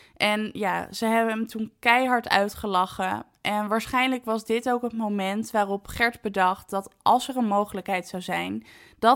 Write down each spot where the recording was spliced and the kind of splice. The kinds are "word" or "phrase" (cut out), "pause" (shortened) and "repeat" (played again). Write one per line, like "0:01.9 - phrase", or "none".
none